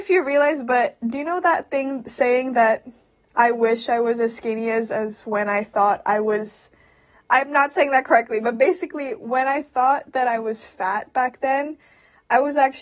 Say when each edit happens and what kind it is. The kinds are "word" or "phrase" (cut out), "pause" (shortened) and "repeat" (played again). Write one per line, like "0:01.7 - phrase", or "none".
none